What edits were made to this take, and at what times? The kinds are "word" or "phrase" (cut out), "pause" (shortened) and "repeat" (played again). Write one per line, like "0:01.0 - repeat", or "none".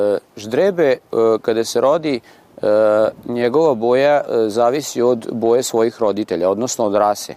none